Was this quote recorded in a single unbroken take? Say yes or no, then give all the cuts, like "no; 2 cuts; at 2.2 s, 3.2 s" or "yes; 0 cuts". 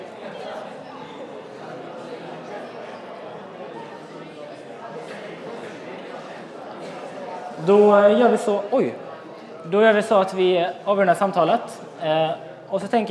yes; 0 cuts